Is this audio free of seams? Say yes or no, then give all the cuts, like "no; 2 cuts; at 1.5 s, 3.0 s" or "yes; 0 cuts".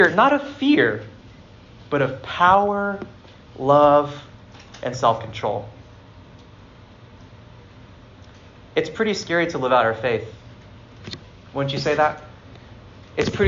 yes; 0 cuts